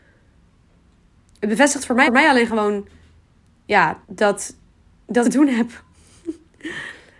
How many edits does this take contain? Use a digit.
3